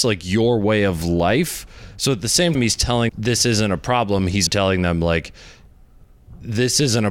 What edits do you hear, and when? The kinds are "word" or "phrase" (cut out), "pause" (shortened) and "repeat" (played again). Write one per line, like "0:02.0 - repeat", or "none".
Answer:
0:02.5 - word
0:03.1 - word
0:04.5 - word

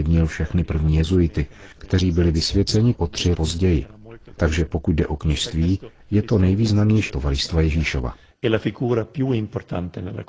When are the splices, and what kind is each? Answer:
0:02.9 - word
0:03.3 - word
0:07.1 - word

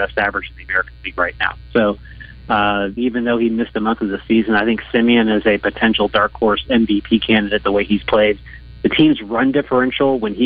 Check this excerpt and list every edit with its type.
0:03.0 - phrase

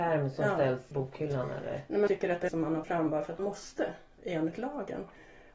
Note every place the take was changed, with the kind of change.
0:00.9 - word
0:02.1 - word
0:02.5 - word
0:02.8 - word
0:03.4 - word

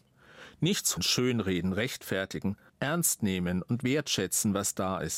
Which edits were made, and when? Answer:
0:01.0 - word
0:02.7 - word

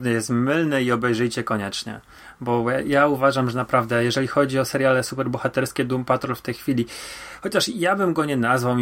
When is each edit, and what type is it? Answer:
none

